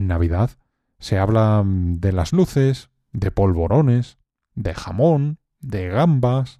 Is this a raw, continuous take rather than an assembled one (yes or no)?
yes